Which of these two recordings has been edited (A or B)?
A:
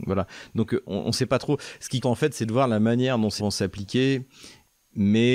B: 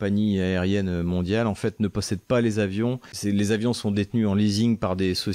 A